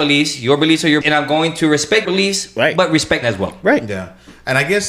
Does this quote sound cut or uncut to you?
cut